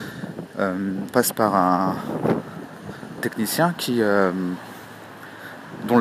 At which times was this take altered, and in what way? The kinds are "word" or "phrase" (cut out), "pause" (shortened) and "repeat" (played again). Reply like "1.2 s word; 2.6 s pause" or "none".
1.1 s word; 3.2 s word